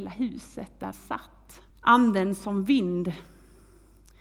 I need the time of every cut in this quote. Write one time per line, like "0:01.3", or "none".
0:00.9
0:01.7